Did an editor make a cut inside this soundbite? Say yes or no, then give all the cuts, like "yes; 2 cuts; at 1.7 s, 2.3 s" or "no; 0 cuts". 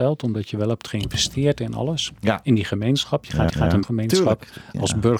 yes; 2 cuts; at 3.5 s, 3.8 s